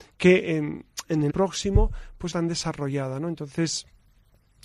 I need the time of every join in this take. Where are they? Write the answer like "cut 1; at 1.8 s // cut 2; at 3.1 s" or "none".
cut 1; at 1.3 s // cut 2; at 2.3 s